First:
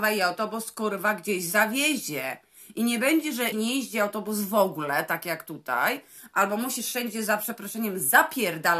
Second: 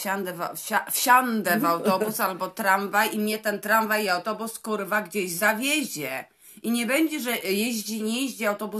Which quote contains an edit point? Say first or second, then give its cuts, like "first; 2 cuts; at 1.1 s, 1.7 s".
first; 1 cut; at 3.5 s